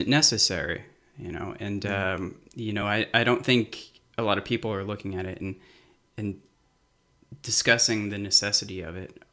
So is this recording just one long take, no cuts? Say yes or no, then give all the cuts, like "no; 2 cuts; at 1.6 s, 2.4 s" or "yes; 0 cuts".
yes; 0 cuts